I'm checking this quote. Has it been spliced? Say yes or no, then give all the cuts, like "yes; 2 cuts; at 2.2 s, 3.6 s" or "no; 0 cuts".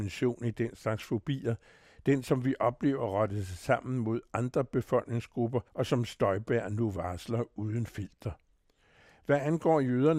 yes; 1 cut; at 5.7 s